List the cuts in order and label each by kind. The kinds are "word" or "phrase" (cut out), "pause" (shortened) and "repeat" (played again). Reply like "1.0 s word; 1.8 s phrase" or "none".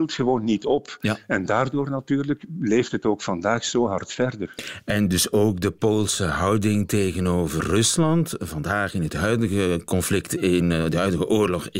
none

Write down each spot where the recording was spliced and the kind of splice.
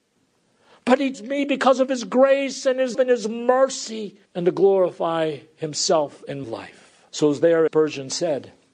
1.1 s word; 2.9 s word; 4.3 s pause; 6.4 s word; 7.1 s pause; 7.7 s word

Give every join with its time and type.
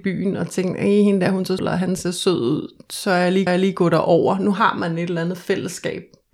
1.6 s word; 3.5 s repeat

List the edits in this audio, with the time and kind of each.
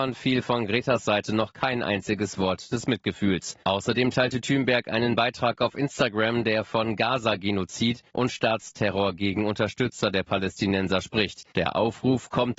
3.6 s pause; 8.1 s pause; 11.5 s pause

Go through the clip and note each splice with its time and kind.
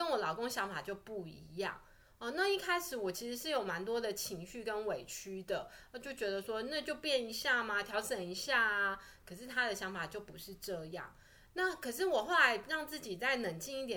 none

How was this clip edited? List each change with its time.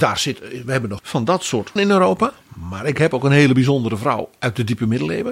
1.0 s word; 1.8 s word

